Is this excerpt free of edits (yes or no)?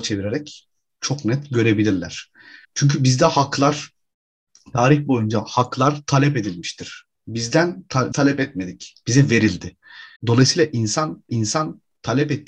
no